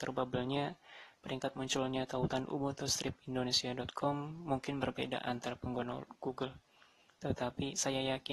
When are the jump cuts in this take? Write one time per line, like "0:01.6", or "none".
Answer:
none